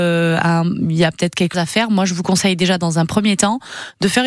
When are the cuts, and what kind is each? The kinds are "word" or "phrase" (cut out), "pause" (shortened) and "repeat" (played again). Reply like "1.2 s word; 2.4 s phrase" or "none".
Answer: 1.5 s word